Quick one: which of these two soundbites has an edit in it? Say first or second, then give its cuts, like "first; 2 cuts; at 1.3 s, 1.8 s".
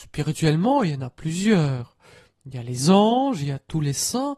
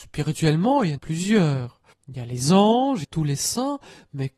second; 3 cuts; at 1.0 s, 1.9 s, 3.0 s